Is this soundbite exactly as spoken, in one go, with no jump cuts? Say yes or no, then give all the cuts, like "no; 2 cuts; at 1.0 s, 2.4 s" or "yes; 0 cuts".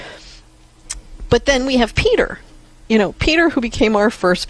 yes; 0 cuts